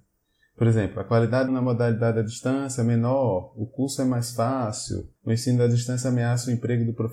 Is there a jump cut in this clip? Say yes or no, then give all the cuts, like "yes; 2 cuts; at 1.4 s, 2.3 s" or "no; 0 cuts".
yes; 2 cuts; at 1.5 s, 5.2 s